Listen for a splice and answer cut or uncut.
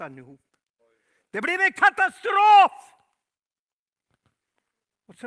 uncut